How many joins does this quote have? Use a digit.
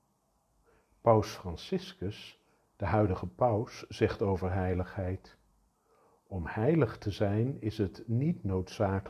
0